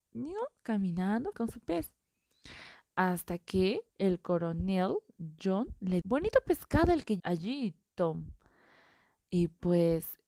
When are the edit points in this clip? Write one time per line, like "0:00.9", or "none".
0:01.3
0:03.9
0:06.0
0:07.2